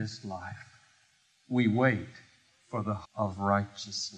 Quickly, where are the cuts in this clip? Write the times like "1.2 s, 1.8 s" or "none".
3.0 s